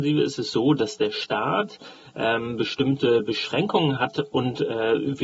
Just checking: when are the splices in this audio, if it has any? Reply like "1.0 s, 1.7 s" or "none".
none